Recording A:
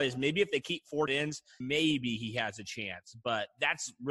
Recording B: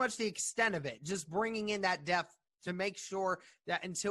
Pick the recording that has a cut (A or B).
A